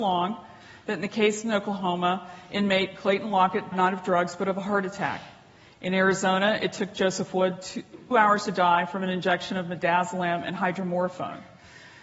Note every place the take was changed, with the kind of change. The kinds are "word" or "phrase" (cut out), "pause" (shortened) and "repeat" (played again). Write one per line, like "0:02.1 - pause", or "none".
0:03.7 - word
0:08.1 - word